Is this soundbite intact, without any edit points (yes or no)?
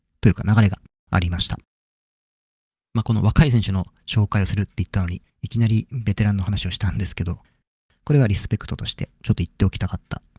no